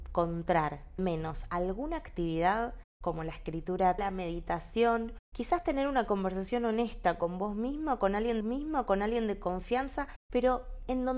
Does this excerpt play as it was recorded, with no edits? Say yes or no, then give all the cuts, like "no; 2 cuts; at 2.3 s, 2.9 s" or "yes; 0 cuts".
no; 3 cuts; at 1.0 s, 4.0 s, 8.4 s